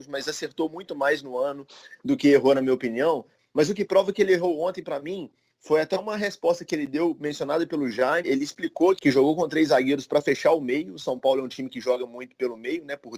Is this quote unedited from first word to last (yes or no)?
no